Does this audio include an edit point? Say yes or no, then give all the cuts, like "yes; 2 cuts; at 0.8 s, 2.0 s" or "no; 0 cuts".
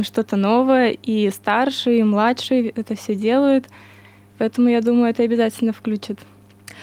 no; 0 cuts